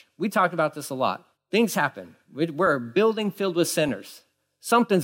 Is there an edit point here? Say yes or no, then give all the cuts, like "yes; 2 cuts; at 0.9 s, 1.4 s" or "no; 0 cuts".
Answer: yes; 1 cut; at 1.3 s